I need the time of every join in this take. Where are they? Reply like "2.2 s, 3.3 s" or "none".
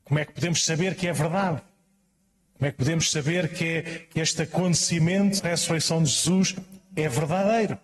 5.4 s